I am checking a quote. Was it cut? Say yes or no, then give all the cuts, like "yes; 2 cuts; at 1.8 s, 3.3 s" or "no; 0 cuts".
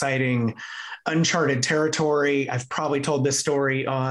no; 0 cuts